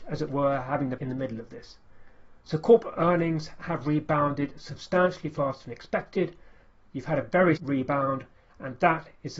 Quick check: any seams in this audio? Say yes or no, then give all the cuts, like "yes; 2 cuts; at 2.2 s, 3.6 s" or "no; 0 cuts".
yes; 2 cuts; at 1.0 s, 7.6 s